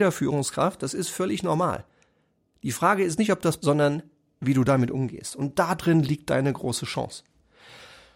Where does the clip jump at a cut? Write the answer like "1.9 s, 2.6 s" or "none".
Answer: 3.6 s